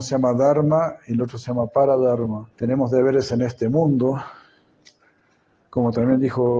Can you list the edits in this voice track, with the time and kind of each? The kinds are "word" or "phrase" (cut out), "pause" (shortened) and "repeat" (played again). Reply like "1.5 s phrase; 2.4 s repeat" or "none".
2.5 s pause